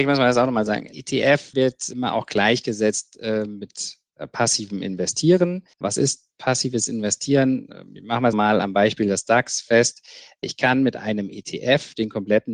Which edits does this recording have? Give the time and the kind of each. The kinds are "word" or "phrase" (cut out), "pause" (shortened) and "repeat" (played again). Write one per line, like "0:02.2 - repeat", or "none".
0:05.7 - pause
0:08.3 - word